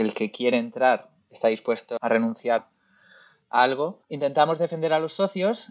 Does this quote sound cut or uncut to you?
cut